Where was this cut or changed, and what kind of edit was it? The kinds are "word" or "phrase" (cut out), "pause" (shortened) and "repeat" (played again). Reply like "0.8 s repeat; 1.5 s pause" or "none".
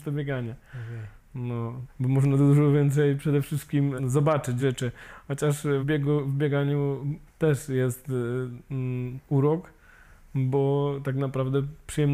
1.9 s word; 4.0 s word; 4.6 s word; 5.8 s word; 7.3 s word